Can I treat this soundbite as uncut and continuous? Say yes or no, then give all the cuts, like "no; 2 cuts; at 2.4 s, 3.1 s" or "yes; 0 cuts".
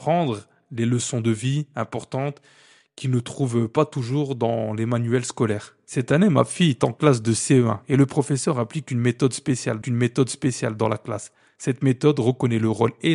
no; 1 cut; at 9.8 s